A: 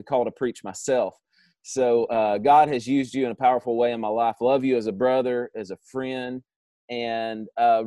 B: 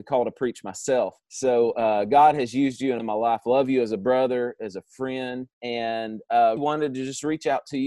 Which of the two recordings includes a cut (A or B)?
B